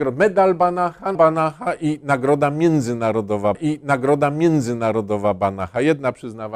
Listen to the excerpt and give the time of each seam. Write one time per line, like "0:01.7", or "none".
0:01.1
0:03.5